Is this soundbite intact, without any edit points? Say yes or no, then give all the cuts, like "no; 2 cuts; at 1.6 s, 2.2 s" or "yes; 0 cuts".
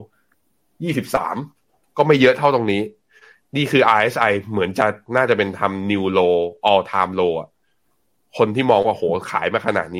yes; 0 cuts